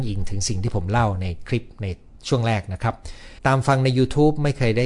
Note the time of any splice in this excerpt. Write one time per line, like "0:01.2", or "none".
0:02.2
0:03.4